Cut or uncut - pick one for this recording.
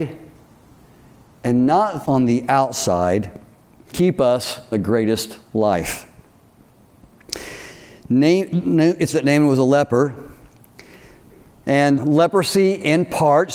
cut